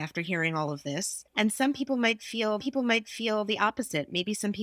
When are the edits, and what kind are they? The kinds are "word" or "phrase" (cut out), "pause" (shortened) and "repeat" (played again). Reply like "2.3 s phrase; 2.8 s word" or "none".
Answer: 1.3 s pause; 2.6 s repeat